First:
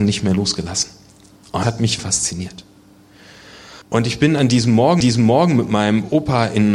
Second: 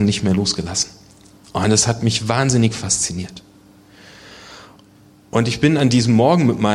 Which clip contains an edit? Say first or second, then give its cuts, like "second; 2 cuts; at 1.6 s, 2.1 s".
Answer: first; 4 cuts; at 1.6 s, 2.0 s, 3.8 s, 5.0 s